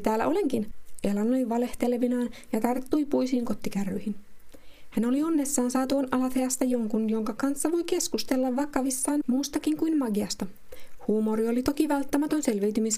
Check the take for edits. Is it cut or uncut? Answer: uncut